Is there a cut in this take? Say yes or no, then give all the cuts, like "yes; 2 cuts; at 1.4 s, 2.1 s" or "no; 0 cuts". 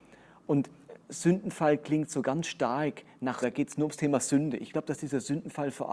yes; 1 cut; at 3.4 s